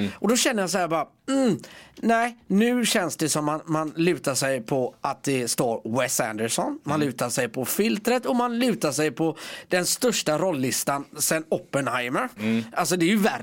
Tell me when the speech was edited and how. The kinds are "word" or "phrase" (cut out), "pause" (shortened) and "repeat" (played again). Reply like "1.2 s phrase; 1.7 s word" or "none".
none